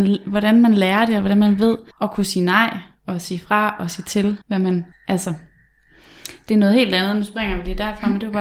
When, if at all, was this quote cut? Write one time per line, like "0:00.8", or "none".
0:01.9
0:04.4
0:04.9